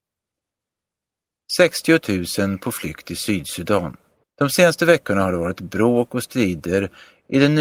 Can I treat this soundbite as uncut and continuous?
no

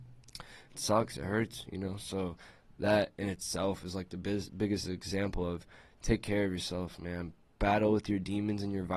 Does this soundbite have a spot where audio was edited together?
no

